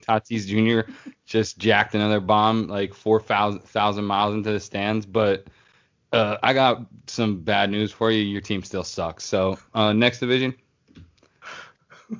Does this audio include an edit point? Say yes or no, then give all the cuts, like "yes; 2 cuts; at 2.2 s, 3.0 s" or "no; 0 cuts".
no; 0 cuts